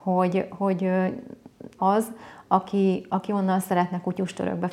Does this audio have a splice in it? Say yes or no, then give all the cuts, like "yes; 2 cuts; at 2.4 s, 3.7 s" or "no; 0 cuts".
yes; 1 cut; at 1.8 s